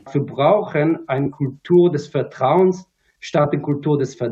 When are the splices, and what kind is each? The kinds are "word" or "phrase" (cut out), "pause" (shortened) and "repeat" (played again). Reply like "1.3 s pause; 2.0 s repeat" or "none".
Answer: none